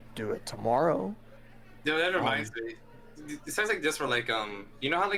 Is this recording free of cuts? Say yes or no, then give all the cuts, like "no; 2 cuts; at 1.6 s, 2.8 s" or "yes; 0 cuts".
yes; 0 cuts